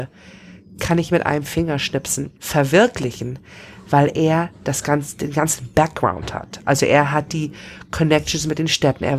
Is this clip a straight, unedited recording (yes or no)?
no